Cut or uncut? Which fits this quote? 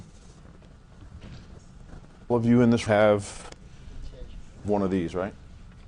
cut